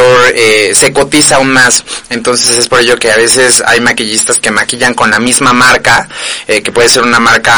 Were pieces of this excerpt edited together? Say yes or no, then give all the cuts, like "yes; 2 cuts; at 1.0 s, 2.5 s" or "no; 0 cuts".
no; 0 cuts